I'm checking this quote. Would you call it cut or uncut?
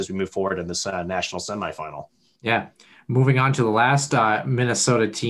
uncut